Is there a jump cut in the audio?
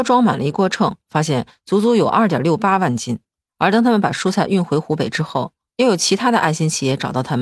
no; 0 cuts

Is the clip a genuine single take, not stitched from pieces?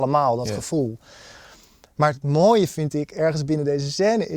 yes; 0 cuts

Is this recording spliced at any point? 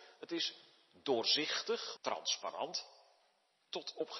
yes; 1 cut; at 2.0 s

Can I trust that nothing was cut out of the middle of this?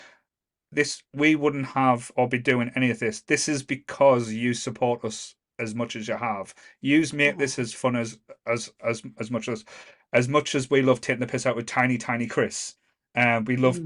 yes; 0 cuts

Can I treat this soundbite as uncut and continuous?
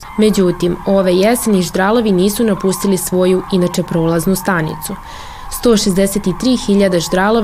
yes; 0 cuts

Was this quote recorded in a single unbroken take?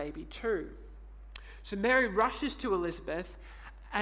yes; 0 cuts

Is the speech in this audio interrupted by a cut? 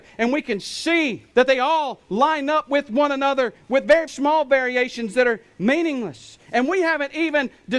yes; 2 cuts; at 1.3 s, 4.1 s

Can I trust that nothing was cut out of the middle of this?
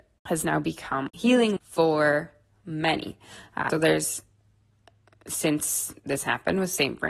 no; 2 cuts; at 1.6 s, 3.7 s

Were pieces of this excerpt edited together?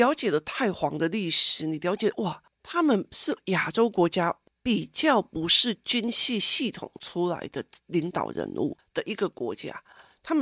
no; 0 cuts

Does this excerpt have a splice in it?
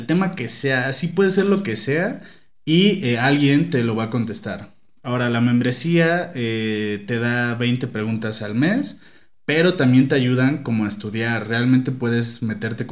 no; 0 cuts

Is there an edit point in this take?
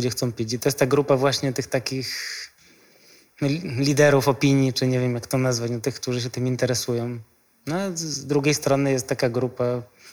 no; 0 cuts

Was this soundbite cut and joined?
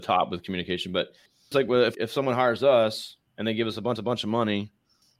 yes; 4 cuts; at 1.5 s, 1.9 s, 3.3 s, 4.0 s

